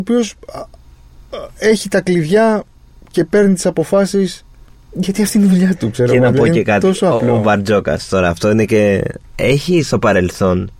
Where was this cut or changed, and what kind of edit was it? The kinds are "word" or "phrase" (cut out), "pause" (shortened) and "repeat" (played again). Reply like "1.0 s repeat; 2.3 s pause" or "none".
none